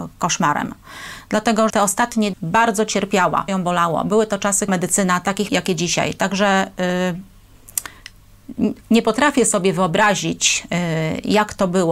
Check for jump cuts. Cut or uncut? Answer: cut